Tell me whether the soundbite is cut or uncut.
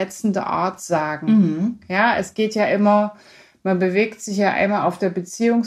uncut